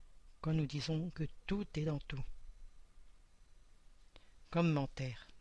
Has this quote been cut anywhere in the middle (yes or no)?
no